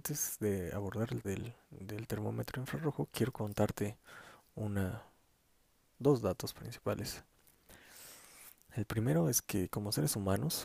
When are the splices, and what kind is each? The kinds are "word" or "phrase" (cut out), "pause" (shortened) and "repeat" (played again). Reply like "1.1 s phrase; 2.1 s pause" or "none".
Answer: 1.2 s word; 1.6 s pause